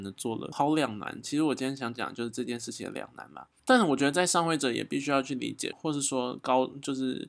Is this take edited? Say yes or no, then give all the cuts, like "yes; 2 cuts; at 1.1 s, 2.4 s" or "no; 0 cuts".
yes; 1 cut; at 5.7 s